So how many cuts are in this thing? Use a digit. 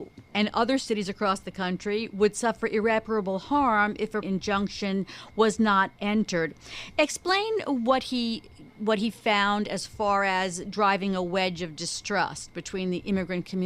1